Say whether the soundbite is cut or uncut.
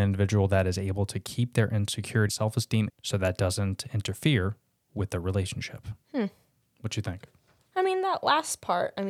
cut